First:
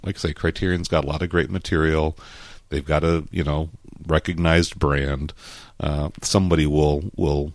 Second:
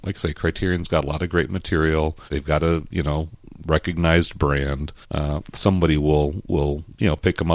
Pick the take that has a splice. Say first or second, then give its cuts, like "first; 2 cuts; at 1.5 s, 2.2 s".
second; 2 cuts; at 2.3 s, 5.0 s